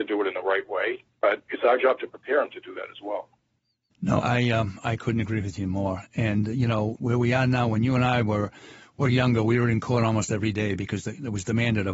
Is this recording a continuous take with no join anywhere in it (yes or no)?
no